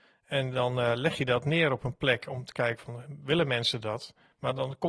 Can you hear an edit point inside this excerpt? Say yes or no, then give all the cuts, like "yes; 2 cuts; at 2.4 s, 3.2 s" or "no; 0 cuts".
no; 0 cuts